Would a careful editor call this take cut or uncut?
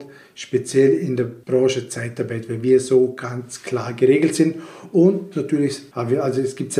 uncut